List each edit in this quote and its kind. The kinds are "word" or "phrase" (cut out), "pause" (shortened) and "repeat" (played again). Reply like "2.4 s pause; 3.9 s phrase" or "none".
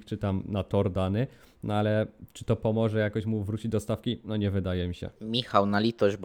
none